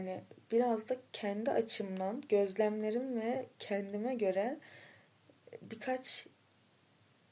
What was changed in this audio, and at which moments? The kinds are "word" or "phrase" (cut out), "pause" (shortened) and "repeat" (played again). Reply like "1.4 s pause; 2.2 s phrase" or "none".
none